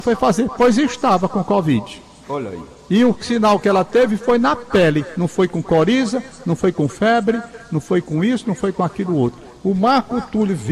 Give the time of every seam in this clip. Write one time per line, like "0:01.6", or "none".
none